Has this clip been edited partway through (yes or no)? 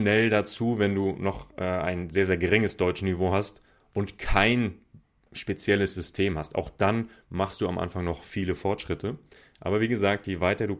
no